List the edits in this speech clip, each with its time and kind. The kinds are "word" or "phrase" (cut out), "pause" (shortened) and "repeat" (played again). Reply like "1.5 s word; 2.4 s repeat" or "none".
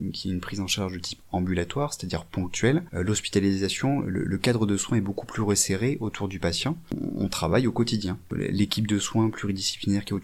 none